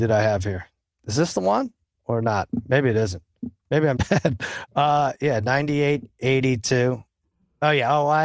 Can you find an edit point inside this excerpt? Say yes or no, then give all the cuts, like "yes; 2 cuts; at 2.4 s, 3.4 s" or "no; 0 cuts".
yes; 1 cut; at 4.0 s